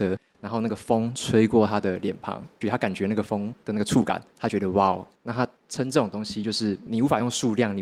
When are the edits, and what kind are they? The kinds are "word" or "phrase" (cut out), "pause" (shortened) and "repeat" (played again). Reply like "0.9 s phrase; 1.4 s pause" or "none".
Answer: 2.6 s phrase; 4.3 s pause; 5.1 s pause; 5.6 s pause